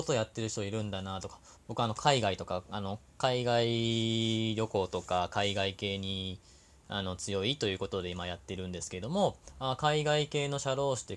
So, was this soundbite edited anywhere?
yes; 1 cut; at 1.6 s

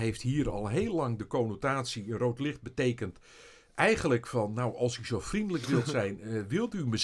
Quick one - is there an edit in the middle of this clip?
no; 0 cuts

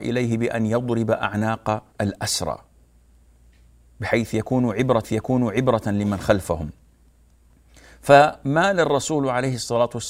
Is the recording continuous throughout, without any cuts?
no; 2 cuts; at 1.9 s, 5.0 s

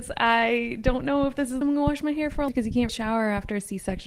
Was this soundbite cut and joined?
yes; 3 cuts; at 1.6 s, 2.5 s, 2.9 s

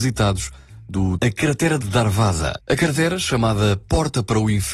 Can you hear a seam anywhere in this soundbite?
yes; 2 cuts; at 1.2 s, 1.8 s

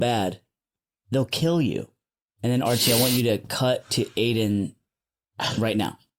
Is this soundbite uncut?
yes; 0 cuts

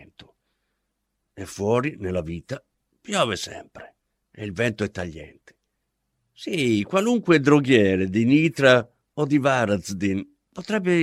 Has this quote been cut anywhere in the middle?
no; 0 cuts

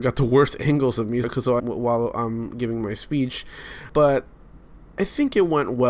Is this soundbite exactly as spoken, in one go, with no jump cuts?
no; 2 cuts; at 1.2 s, 1.6 s

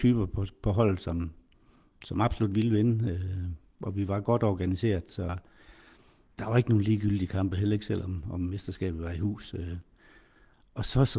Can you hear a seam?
no; 0 cuts

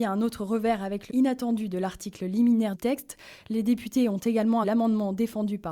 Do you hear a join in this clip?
yes; 3 cuts; at 1.1 s, 2.7 s, 4.6 s

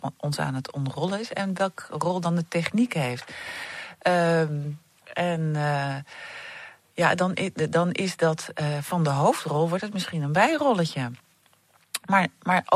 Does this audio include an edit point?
no; 0 cuts

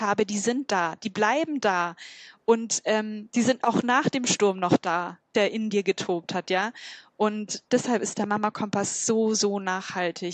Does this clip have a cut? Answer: no; 0 cuts

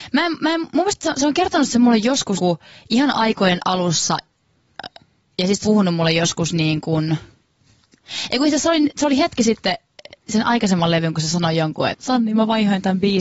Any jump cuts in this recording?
yes; 4 cuts; at 2.4 s, 5.6 s, 11.1 s, 11.9 s

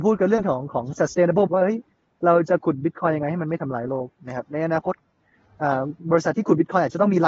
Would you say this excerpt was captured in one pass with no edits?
no; 1 cut; at 1.5 s

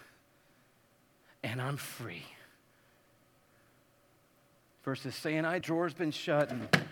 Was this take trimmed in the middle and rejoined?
yes; 1 cut; at 5.6 s

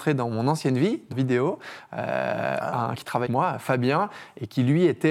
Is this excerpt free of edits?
no; 3 cuts; at 1.1 s, 3.0 s, 3.3 s

